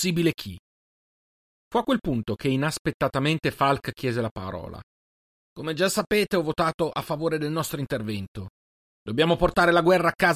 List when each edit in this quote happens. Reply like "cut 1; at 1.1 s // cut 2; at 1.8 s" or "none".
none